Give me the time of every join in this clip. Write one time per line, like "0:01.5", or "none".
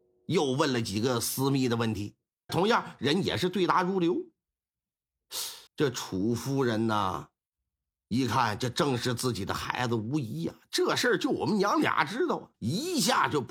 0:02.5
0:05.7
0:12.5